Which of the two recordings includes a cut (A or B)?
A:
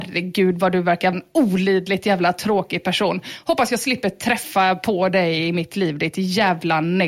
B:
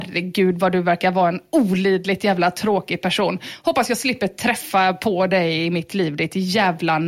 A